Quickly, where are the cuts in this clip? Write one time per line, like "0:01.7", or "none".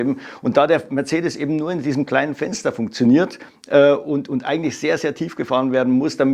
none